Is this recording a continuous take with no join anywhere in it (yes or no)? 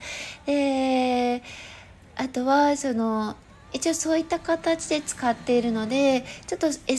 yes